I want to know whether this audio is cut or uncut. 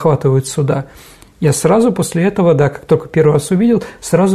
uncut